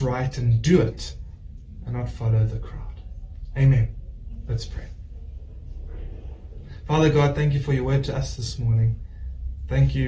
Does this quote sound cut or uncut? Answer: uncut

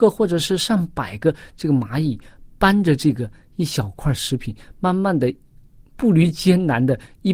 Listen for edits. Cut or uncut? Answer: uncut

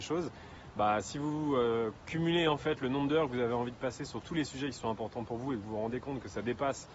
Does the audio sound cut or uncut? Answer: uncut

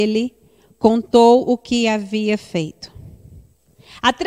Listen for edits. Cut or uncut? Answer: uncut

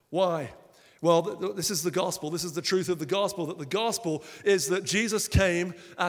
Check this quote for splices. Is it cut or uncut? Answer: uncut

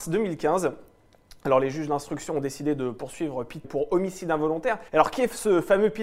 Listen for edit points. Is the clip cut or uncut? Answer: cut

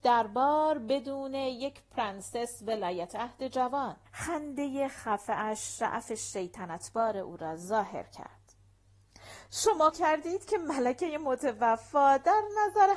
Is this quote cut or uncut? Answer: cut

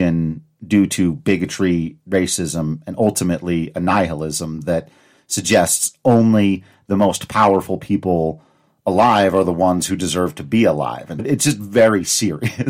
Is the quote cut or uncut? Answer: cut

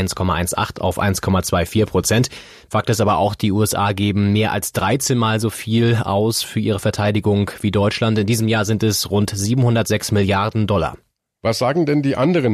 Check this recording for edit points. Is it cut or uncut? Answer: uncut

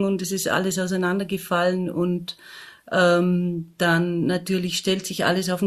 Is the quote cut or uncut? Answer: uncut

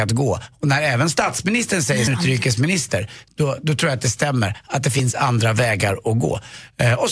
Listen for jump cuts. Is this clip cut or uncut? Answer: cut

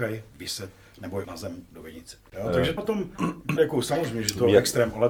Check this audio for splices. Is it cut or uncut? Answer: cut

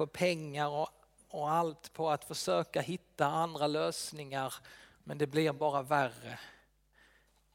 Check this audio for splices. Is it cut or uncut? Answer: uncut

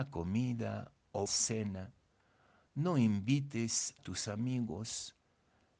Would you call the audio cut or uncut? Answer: cut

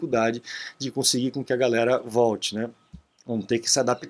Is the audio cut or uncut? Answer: uncut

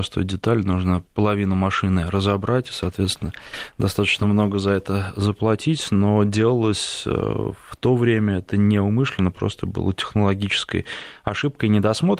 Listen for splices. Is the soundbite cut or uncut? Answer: uncut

